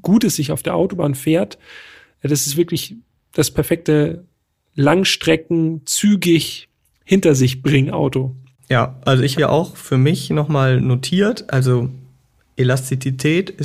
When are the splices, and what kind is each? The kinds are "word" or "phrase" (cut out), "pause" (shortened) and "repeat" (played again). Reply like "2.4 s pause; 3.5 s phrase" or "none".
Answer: 9.3 s word